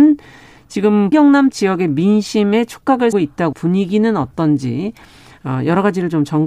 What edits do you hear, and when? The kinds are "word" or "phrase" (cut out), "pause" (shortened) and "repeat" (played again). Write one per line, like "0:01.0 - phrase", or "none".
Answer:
0:01.1 - word
0:01.5 - word
0:03.1 - word
0:03.5 - word